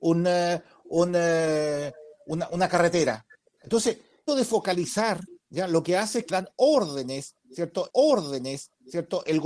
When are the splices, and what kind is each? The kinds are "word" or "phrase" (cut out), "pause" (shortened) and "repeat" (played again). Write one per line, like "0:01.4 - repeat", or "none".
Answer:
0:04.3 - word
0:06.3 - word
0:07.9 - repeat

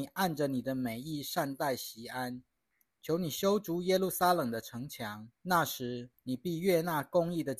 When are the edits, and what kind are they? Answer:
0:05.3 - pause
0:06.2 - pause

